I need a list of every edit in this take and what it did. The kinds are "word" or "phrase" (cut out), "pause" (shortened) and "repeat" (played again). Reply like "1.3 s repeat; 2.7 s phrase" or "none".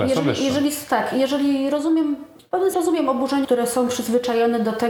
2.7 s word; 3.4 s phrase

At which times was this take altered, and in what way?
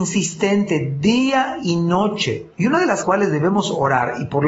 2.5 s pause; 3.0 s phrase

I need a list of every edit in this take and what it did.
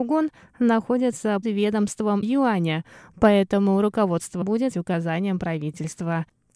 1.4 s word; 2.2 s word; 4.4 s word; 4.7 s word

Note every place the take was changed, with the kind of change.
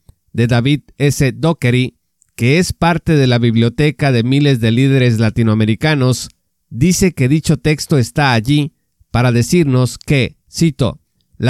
none

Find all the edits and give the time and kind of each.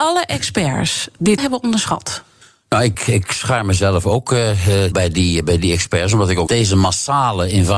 1.4 s word; 2.4 s pause; 2.9 s word; 4.9 s word; 6.5 s phrase

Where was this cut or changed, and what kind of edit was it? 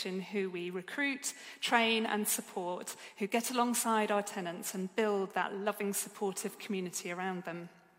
none

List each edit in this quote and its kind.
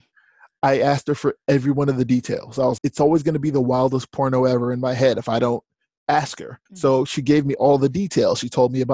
2.8 s word; 6.7 s pause

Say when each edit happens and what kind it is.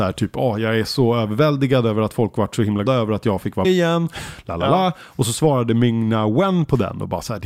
2.9 s word; 3.6 s word

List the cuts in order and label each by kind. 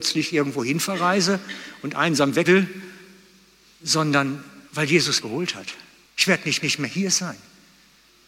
2.4 s word; 4.7 s pause; 5.2 s word; 6.1 s pause; 6.6 s repeat

